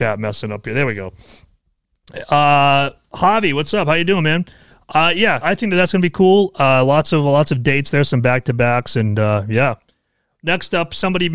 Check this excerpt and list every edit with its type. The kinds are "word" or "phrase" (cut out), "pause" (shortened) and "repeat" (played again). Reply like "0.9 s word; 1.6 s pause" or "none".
5.4 s word